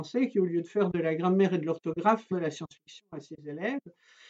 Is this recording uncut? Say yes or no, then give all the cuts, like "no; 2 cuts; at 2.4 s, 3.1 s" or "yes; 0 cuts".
no; 1 cut; at 2.3 s